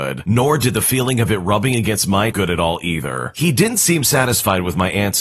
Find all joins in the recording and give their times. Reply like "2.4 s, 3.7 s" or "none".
2.3 s